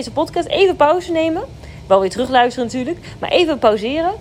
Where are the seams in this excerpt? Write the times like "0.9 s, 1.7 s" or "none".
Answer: none